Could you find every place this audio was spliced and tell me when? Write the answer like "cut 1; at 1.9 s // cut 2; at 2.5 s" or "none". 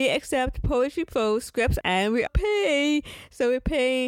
cut 1; at 1.8 s // cut 2; at 2.3 s